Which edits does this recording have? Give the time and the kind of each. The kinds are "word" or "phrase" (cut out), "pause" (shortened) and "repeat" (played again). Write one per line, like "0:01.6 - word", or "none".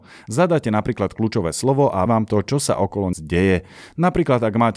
0:02.1 - word
0:03.1 - phrase